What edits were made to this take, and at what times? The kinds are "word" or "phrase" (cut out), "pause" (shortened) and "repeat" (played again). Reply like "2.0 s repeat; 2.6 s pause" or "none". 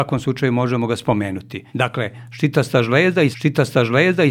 1.7 s pause; 3.3 s repeat